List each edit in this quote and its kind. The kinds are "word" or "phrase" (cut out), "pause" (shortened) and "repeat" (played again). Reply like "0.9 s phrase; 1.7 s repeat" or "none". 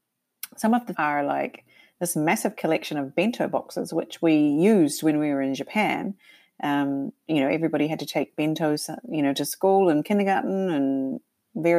0.9 s word